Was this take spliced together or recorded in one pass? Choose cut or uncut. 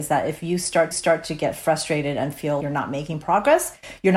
cut